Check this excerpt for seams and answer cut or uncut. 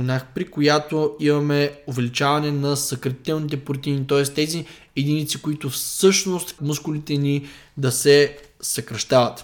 cut